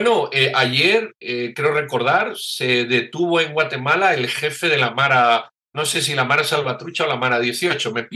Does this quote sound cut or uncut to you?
uncut